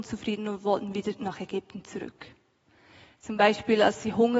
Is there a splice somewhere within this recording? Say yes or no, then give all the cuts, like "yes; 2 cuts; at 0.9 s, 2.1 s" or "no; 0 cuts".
no; 0 cuts